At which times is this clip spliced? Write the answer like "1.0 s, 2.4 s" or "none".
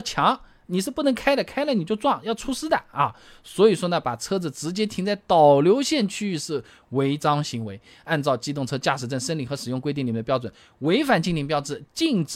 none